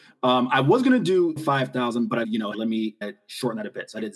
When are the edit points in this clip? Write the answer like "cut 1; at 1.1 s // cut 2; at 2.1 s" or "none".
cut 1; at 1.4 s // cut 2; at 2.2 s // cut 3; at 2.5 s // cut 4; at 3.0 s

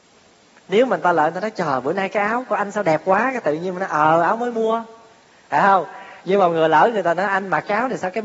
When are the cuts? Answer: none

